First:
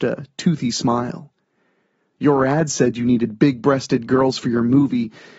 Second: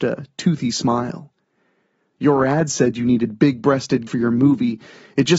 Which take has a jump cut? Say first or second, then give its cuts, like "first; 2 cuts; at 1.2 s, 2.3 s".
second; 1 cut; at 4.1 s